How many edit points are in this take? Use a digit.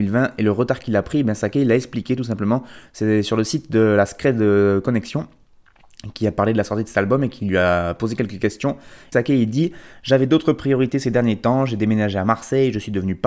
1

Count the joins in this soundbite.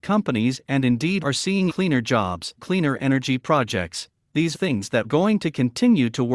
5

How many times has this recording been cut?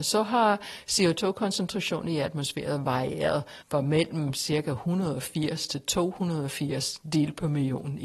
1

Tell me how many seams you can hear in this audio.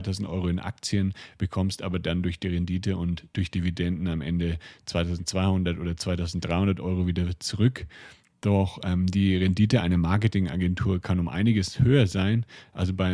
0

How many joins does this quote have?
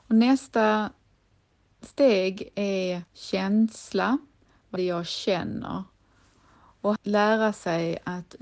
3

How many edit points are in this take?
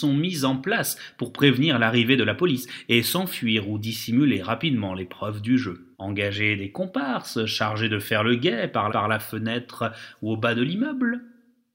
2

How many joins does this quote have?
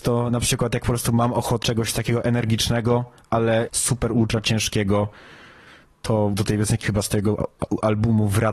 4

